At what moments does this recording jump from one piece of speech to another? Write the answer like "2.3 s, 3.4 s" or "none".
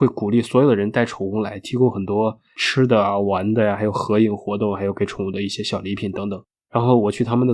6.6 s

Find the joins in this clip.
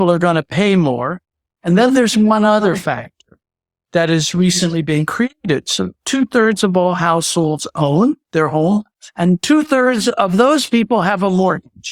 none

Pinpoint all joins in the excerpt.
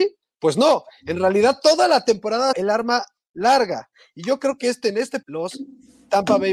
2.5 s, 5.2 s

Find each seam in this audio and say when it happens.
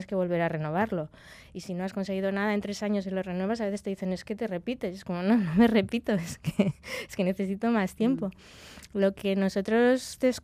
none

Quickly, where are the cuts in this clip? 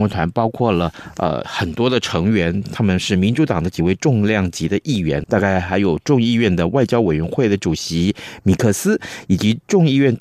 5.2 s

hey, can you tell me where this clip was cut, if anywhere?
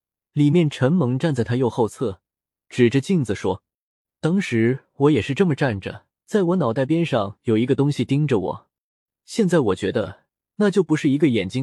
6.2 s

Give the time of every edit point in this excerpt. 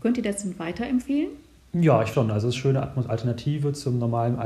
1.6 s, 2.1 s, 2.5 s, 3.1 s

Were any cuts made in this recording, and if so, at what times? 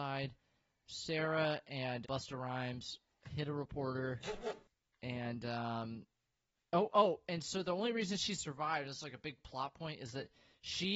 2.0 s

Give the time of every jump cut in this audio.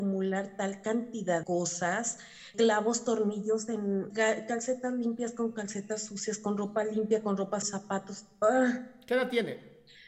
1.4 s, 2.5 s, 4.1 s, 7.6 s

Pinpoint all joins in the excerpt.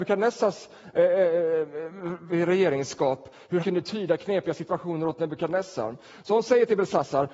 3.6 s

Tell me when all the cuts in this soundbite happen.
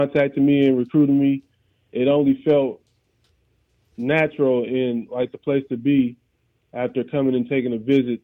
none

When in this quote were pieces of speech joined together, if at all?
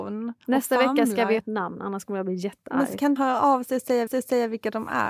1.4 s, 3.2 s, 4.1 s

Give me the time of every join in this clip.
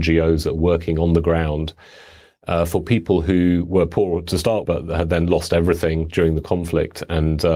4.6 s

